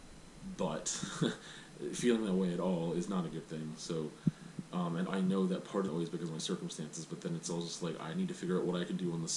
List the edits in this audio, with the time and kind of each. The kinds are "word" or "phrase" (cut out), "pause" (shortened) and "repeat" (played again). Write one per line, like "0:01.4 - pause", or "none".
0:05.1 - word
0:05.9 - phrase